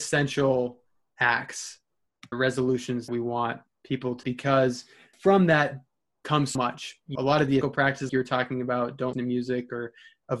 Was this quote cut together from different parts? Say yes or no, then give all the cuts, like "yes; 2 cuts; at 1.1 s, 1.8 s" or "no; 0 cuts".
yes; 9 cuts; at 2.3 s, 3.1 s, 4.2 s, 5.1 s, 6.6 s, 7.2 s, 7.6 s, 8.1 s, 9.1 s